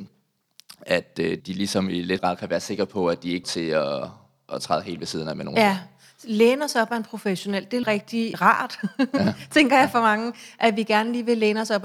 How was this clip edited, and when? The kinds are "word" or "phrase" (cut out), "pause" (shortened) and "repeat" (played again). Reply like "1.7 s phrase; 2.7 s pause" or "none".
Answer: 1.4 s word; 2.2 s word; 3.4 s word; 4.5 s word; 7.8 s word; 8.3 s word